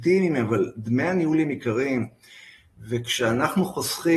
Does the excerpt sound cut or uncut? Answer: uncut